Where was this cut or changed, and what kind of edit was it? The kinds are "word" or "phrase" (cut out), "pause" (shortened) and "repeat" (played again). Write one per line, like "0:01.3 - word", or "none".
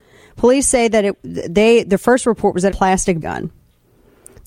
0:02.7 - phrase
0:03.2 - word